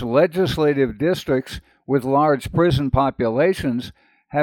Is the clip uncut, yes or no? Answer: yes